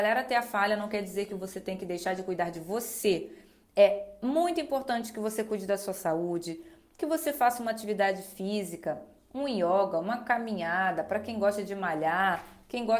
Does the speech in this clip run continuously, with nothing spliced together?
yes; 0 cuts

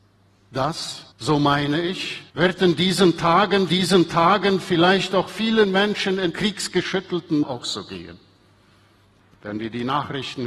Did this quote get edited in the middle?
yes; 5 cuts; at 1.1 s, 2.3 s, 3.7 s, 6.3 s, 7.4 s

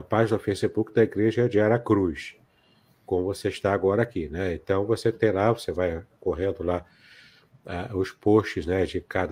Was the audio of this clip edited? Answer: no; 0 cuts

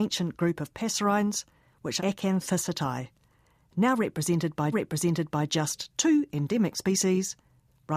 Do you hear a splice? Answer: yes; 2 cuts; at 2.0 s, 4.7 s

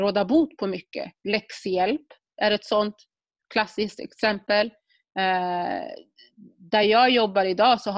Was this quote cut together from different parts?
no; 0 cuts

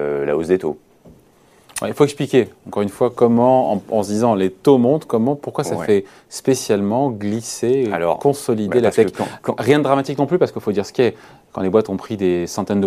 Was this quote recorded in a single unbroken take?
yes; 0 cuts

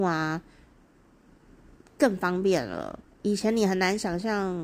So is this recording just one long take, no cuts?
no; 1 cut; at 3.0 s

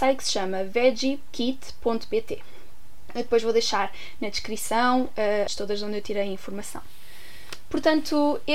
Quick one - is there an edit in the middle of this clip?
yes; 1 cut; at 5.5 s

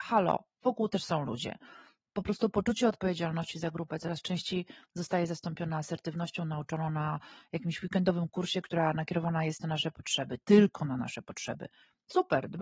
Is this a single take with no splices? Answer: yes; 0 cuts

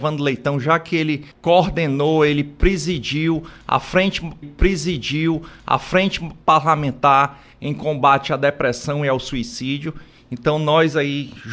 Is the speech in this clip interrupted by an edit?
yes; 2 cuts; at 1.3 s, 4.4 s

